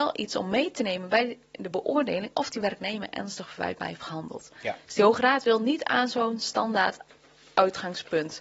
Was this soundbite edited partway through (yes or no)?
no